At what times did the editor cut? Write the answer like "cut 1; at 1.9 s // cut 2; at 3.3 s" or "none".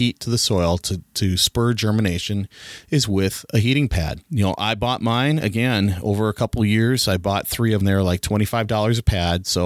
cut 1; at 7.8 s